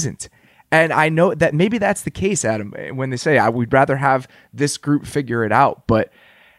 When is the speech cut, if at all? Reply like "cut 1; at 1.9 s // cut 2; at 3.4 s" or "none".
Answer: none